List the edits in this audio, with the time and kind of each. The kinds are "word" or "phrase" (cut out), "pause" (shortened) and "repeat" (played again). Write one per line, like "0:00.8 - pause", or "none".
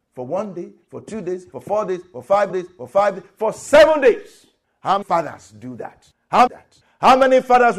0:01.5 - phrase
0:02.5 - repeat
0:05.0 - word
0:06.5 - phrase